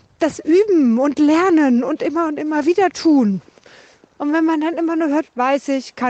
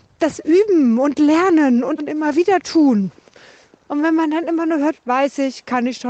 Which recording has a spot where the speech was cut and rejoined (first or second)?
second